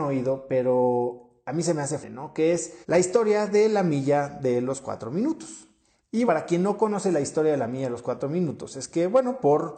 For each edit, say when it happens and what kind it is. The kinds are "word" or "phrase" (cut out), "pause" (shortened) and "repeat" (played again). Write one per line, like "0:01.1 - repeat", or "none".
0:02.0 - word
0:02.8 - pause
0:06.3 - word